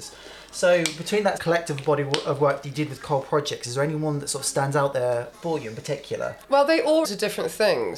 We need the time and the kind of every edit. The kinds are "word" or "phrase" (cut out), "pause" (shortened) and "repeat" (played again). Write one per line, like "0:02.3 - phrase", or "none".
0:01.4 - word
0:05.3 - word
0:06.4 - pause
0:07.0 - word

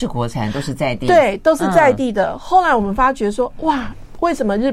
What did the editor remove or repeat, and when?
none

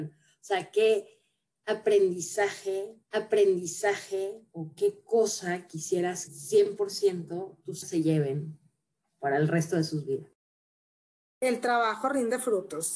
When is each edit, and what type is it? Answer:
0:03.0 - repeat
0:06.3 - word
0:07.8 - word

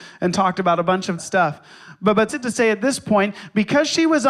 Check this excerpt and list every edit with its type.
0:01.2 - word
0:02.3 - word

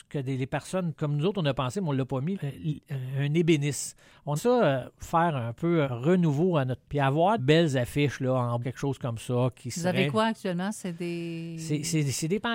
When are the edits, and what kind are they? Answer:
0:00.9 - word
0:02.3 - word
0:04.4 - word
0:05.8 - word
0:06.8 - word
0:07.4 - word
0:08.6 - word

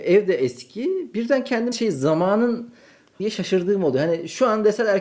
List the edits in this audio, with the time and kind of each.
0:01.7 - word
0:03.2 - word

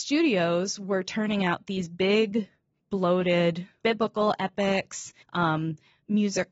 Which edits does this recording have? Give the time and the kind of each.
0:03.8 - word
0:05.2 - pause

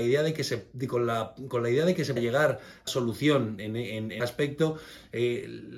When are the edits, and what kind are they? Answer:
0:02.2 - word
0:02.9 - word
0:03.6 - word
0:04.2 - word

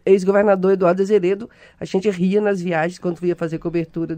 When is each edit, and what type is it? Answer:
none

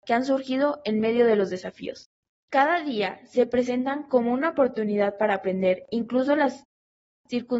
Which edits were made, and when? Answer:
0:02.3 - pause

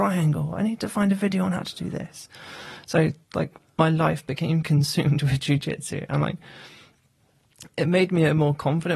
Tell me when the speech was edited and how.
none

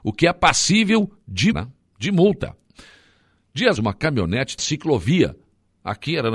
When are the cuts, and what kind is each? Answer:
0:01.5 - word
0:03.8 - word
0:04.6 - phrase

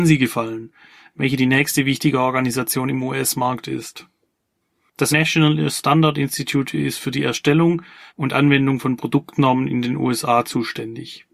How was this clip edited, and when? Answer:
0:05.1 - word
0:08.1 - word

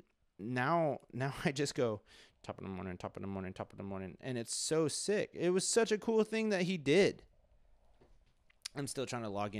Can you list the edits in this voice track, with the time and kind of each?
none

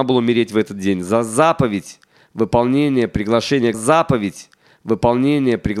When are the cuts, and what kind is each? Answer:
0:03.7 - repeat

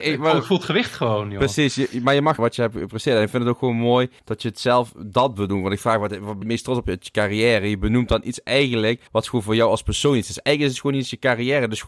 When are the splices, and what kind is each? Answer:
0:02.4 - phrase
0:04.2 - pause
0:06.4 - word
0:09.1 - pause

